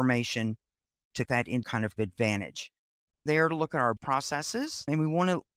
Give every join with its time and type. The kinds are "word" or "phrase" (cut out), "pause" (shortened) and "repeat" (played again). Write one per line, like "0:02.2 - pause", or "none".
0:01.3 - word
0:01.6 - word
0:02.0 - word
0:03.3 - phrase
0:04.0 - word

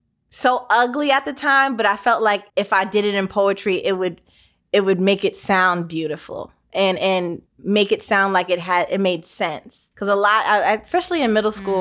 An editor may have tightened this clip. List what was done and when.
0:02.5 - pause
0:07.5 - pause
0:09.9 - pause

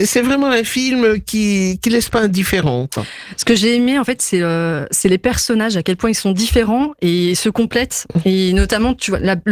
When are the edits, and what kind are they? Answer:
none

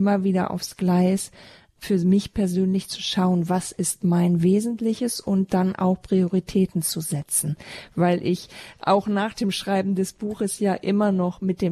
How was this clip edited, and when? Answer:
none

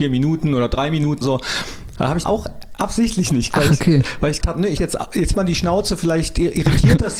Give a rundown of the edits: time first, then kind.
0:01.2 - word
0:02.2 - word
0:03.5 - word
0:04.4 - word
0:04.8 - word
0:05.3 - word

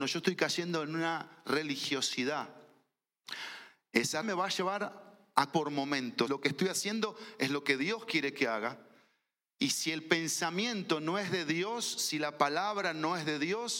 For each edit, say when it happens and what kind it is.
0:04.2 - word
0:05.5 - word
0:06.3 - word

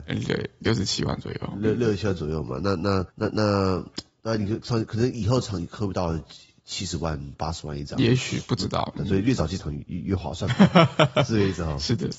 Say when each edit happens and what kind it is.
0:03.1 - pause
0:09.0 - phrase

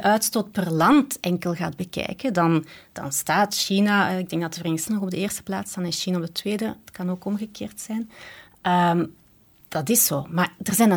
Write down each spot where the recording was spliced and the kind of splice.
0:04.9 - word

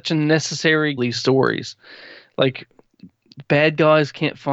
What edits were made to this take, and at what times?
0:01.0 - phrase

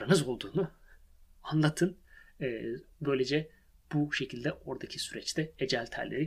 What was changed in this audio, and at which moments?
none

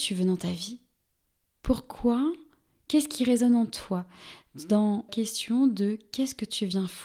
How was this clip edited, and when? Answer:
0:05.1 - word

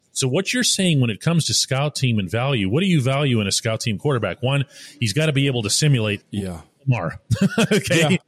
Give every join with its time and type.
0:06.2 - word

